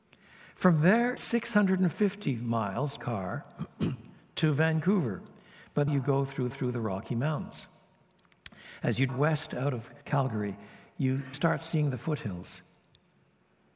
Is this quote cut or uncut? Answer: cut